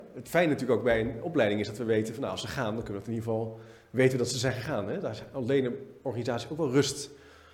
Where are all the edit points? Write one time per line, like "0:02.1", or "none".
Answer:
none